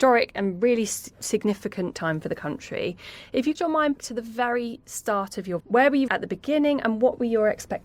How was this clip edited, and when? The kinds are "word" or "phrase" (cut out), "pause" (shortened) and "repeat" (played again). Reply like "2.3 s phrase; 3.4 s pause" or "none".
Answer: 1.9 s word; 3.6 s word; 4.0 s word; 5.6 s word; 6.1 s word